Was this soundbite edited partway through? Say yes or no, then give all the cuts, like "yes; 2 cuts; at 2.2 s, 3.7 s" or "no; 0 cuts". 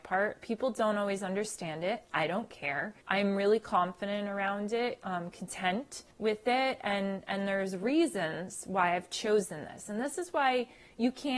yes; 2 cuts; at 3.0 s, 6.1 s